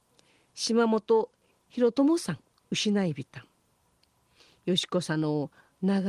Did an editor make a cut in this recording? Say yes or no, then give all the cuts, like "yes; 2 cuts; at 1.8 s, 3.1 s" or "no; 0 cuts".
yes; 1 cut; at 2.5 s